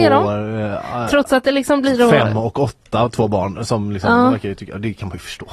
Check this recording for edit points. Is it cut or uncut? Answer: uncut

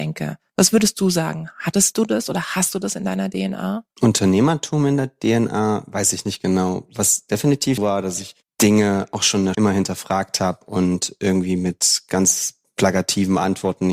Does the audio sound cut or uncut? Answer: cut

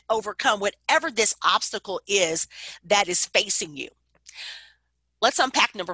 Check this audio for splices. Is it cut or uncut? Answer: uncut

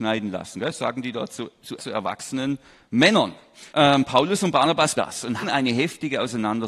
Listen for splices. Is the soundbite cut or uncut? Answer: cut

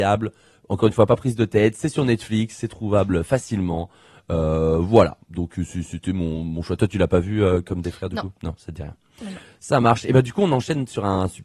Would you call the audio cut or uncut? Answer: uncut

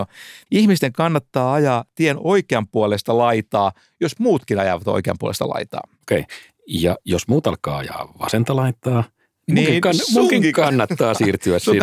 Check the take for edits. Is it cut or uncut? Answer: uncut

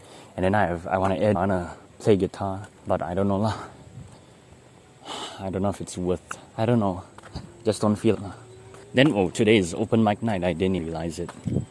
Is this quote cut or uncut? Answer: cut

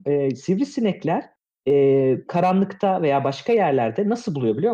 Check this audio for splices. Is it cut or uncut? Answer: cut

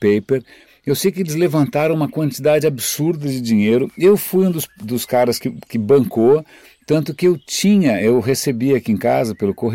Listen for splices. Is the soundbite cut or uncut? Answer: uncut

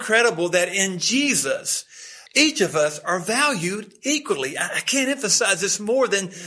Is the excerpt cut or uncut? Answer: cut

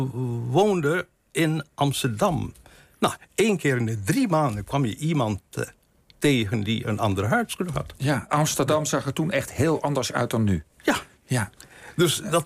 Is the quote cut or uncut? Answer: uncut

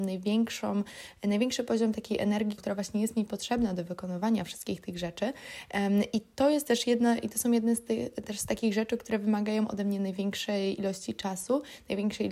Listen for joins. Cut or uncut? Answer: cut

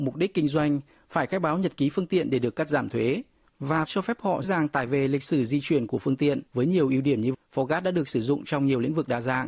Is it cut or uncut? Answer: cut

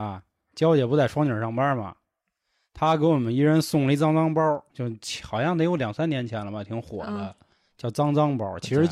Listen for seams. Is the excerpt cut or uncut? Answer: cut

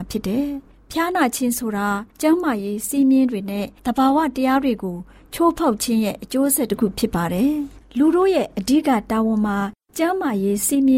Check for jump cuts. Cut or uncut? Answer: cut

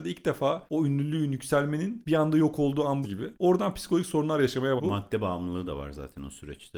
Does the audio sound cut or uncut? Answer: cut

